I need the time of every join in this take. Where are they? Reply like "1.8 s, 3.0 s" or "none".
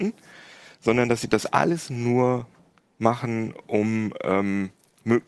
none